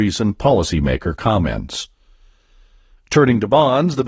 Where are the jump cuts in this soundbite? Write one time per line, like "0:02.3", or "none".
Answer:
none